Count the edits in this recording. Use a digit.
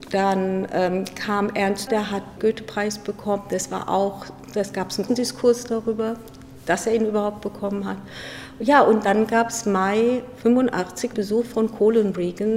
4